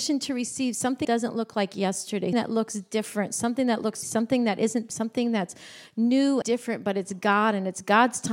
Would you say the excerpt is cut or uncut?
cut